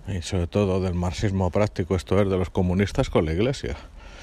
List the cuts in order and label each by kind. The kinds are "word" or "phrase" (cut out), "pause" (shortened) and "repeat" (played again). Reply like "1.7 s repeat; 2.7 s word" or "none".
none

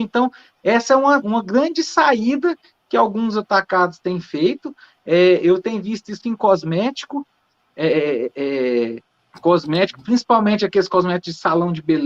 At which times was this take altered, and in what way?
1.2 s word; 6.2 s word; 9.1 s pause

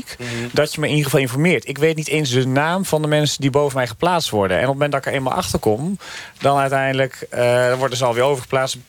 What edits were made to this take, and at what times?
none

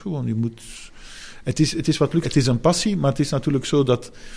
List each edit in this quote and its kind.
2.2 s word

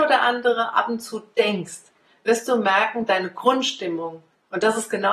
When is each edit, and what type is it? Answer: none

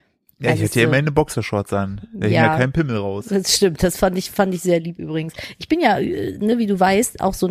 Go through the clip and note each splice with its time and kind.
none

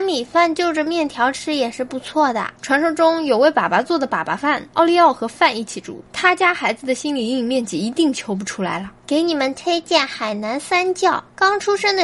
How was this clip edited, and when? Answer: 2.6 s pause

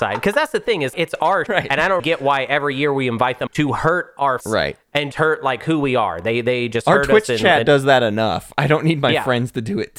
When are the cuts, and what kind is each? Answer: 0.9 s word; 1.5 s word; 2.0 s word; 3.5 s word; 4.4 s word; 5.1 s word

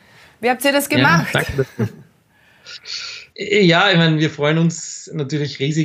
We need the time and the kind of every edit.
3.3 s pause

